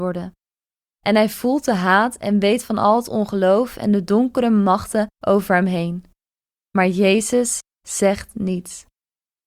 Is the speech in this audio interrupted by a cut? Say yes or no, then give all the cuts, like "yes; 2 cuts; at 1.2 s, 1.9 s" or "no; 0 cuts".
yes; 1 cut; at 5.1 s